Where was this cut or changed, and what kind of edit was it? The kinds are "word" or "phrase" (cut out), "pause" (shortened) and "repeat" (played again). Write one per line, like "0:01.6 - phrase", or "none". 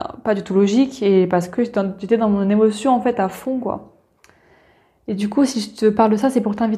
none